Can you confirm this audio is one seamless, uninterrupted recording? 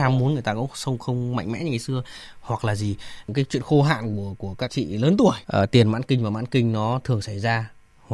no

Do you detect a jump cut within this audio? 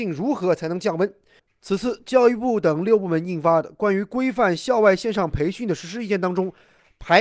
no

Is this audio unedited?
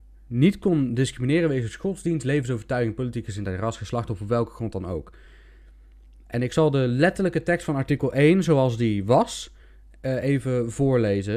yes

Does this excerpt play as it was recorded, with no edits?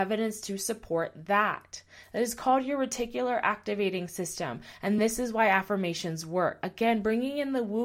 yes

